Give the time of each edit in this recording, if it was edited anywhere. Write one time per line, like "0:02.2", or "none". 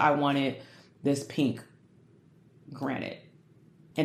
none